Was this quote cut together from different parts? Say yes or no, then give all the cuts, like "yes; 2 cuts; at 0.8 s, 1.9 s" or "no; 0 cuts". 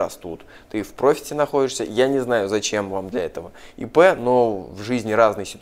no; 0 cuts